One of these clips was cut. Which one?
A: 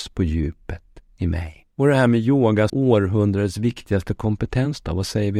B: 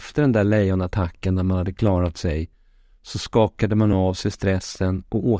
A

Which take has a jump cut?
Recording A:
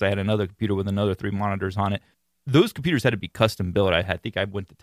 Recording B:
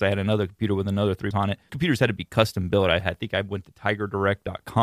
B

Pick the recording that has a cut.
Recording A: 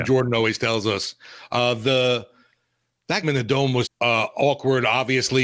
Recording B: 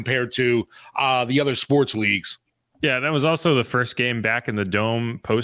A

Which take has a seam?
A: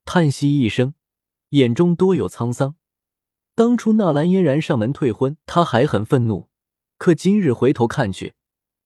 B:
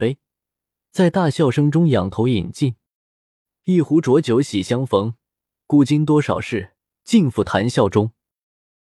A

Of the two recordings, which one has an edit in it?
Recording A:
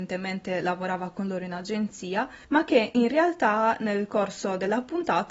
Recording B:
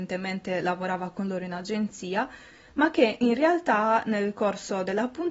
A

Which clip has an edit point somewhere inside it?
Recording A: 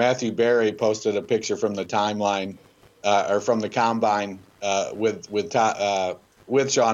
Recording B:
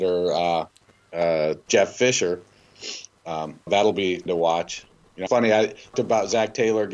B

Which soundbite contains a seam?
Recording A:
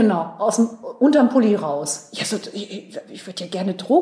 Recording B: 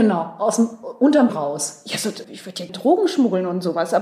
B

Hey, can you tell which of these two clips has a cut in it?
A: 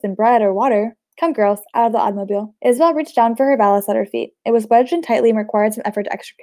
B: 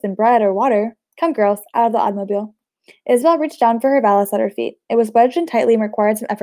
A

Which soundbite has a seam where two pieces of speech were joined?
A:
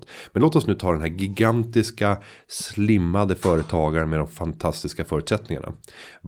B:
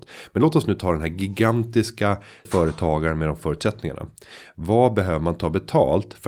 B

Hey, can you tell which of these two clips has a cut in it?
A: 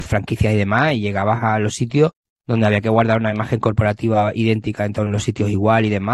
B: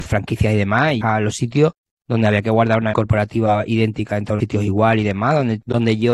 B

